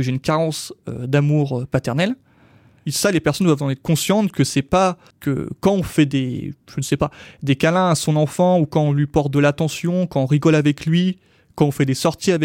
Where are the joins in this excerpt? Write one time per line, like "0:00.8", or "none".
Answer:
none